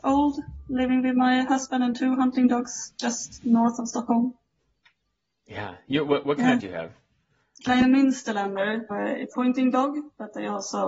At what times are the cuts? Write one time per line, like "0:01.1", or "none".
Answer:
0:06.6
0:08.9
0:09.3